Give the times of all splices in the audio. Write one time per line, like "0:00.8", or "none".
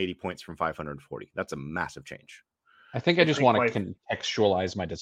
none